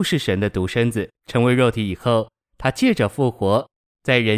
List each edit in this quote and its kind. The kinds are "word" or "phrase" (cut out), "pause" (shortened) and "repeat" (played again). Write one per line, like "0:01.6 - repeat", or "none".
0:01.2 - pause